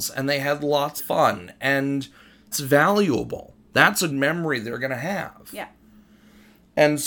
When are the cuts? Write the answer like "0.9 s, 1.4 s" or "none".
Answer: 1.0 s, 2.5 s, 4.1 s